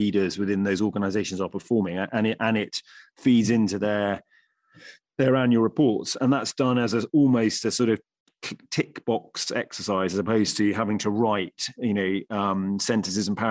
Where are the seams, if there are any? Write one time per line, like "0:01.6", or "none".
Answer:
none